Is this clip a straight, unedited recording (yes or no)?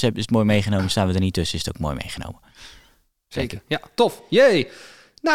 yes